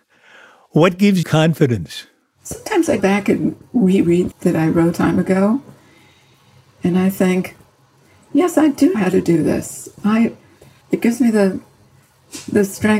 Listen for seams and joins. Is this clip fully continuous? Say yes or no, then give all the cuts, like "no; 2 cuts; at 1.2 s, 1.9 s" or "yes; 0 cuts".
no; 6 cuts; at 1.2 s, 3.0 s, 4.3 s, 4.9 s, 8.9 s, 10.8 s